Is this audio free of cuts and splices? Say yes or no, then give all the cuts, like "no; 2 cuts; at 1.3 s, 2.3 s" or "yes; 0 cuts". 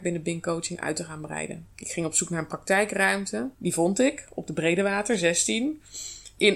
no; 2 cuts; at 1.7 s, 3.5 s